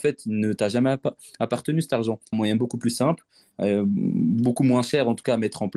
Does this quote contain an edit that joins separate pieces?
yes; 1 cut; at 2.3 s

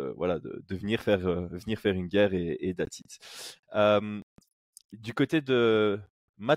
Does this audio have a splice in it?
no; 0 cuts

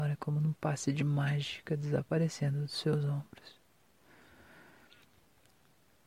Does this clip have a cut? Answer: no; 0 cuts

